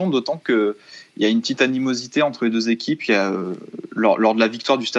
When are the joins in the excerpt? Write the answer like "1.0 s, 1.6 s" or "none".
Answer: none